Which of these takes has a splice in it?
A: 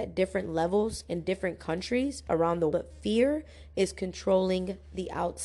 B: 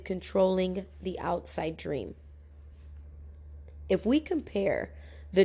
A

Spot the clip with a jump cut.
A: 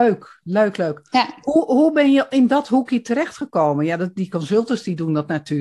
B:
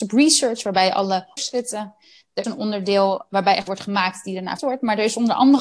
B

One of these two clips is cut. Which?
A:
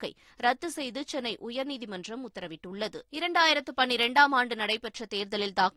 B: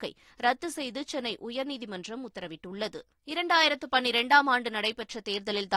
A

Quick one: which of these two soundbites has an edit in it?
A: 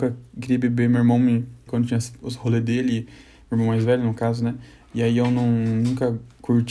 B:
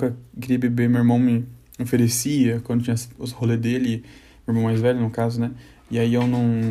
A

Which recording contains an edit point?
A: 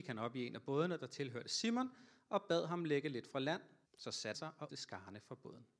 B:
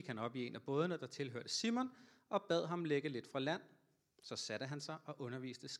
A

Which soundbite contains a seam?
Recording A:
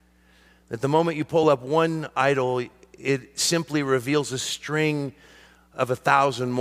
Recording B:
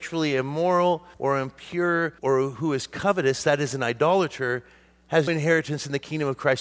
B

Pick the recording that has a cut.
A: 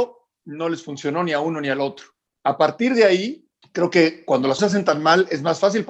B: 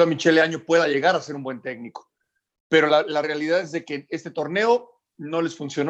A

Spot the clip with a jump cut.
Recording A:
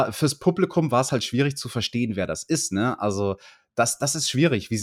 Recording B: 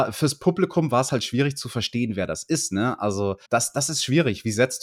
B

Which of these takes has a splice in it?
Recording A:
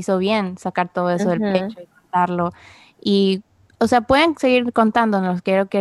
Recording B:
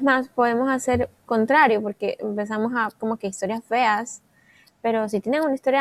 B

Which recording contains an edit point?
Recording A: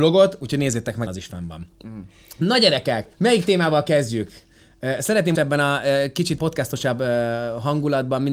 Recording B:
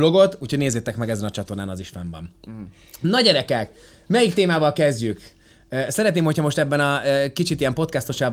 A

